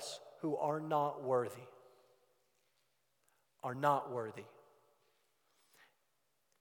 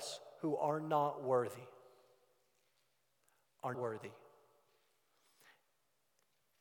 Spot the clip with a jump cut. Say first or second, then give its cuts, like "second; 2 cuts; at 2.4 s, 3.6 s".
second; 1 cut; at 3.7 s